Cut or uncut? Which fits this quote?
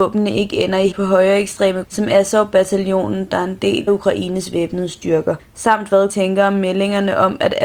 cut